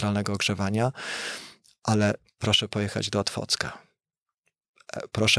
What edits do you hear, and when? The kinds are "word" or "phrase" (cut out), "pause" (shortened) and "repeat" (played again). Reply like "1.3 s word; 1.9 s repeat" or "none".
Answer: none

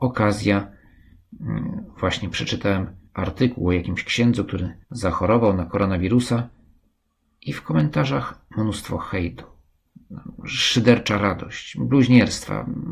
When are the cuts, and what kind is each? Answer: 3.1 s pause; 4.8 s pause

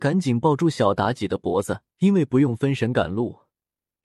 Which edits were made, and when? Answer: 1.9 s pause

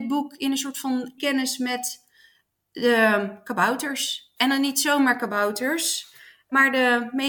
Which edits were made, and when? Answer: 1.2 s word

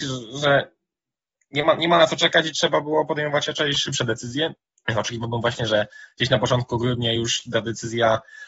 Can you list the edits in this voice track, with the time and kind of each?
none

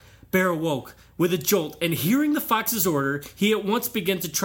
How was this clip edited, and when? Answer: none

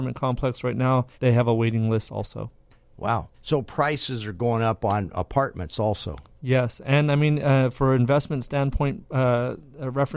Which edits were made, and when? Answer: 1.1 s pause; 3.3 s pause

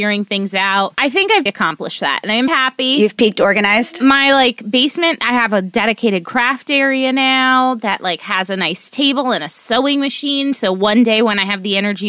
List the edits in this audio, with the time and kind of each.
1.5 s word; 2.5 s word

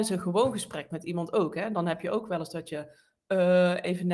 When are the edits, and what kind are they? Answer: none

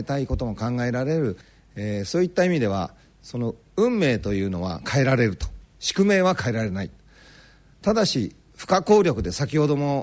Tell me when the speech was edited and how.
none

